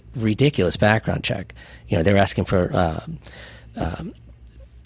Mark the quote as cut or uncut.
uncut